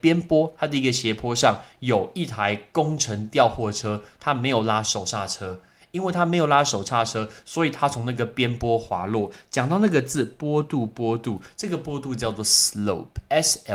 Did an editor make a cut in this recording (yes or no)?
no